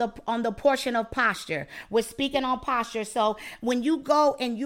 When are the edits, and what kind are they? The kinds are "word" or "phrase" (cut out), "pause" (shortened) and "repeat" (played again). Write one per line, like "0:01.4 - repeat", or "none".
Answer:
none